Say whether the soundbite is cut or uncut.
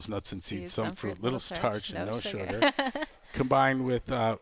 uncut